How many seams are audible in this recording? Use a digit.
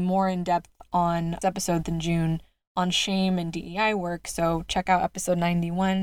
2